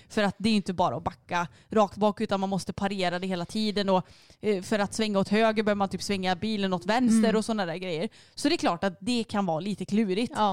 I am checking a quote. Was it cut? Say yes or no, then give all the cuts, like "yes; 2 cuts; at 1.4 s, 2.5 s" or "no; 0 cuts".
no; 0 cuts